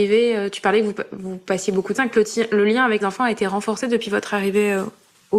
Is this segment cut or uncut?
cut